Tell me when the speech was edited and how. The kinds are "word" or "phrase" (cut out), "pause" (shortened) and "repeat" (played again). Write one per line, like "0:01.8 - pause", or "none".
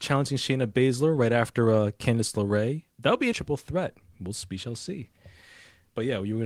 0:02.9 - pause
0:03.3 - phrase